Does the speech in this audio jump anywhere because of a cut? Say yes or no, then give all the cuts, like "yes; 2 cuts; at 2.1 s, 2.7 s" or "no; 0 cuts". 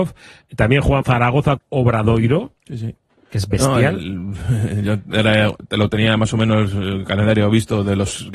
yes; 2 cuts; at 1.0 s, 1.6 s